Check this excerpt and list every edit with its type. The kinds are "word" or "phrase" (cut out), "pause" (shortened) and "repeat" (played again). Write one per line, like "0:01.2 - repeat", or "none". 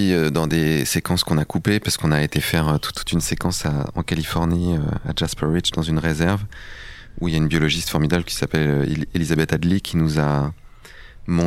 0:02.9 - word